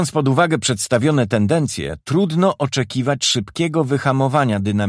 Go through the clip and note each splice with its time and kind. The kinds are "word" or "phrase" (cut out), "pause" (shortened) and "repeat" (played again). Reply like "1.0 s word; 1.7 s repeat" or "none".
none